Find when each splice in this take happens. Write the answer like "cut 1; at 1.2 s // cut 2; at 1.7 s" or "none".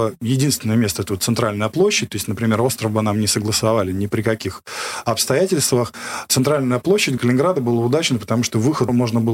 cut 1; at 7.2 s